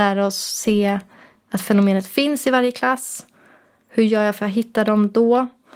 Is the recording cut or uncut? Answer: uncut